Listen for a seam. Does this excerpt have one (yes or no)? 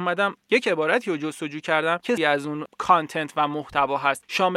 yes